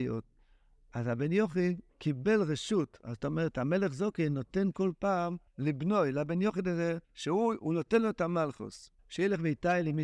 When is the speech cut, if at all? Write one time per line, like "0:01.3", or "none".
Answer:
0:01.9
0:05.5
0:07.0
0:09.0